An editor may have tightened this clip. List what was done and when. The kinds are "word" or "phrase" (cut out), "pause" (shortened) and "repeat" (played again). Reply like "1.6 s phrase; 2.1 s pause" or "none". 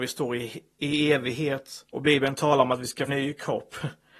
1.9 s pause; 3.1 s phrase